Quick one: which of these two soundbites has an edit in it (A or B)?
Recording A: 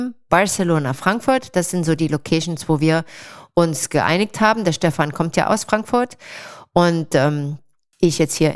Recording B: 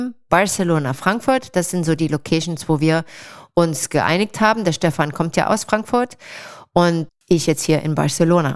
B